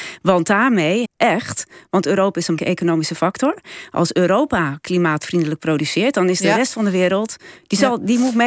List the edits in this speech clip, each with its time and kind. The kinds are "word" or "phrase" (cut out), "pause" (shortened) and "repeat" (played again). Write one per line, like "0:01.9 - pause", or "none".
0:01.0 - phrase
0:02.6 - word